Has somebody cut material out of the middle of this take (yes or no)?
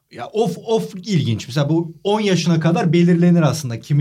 no